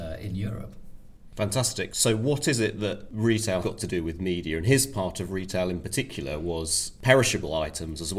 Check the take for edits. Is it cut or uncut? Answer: cut